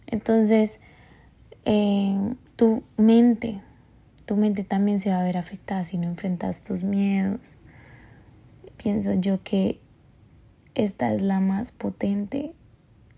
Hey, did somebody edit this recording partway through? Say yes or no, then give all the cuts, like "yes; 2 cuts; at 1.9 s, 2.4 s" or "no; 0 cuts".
yes; 2 cuts; at 2.5 s, 8.7 s